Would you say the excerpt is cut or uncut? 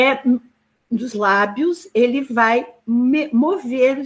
cut